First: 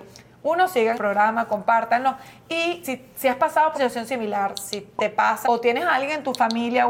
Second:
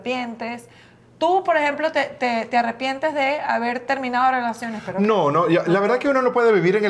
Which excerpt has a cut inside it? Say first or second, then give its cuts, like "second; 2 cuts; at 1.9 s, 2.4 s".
first; 4 cuts; at 0.9 s, 2.8 s, 3.7 s, 5.4 s